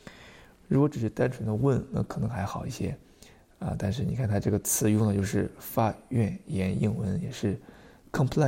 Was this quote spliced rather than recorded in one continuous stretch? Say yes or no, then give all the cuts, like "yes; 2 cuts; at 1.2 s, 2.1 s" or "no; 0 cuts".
no; 0 cuts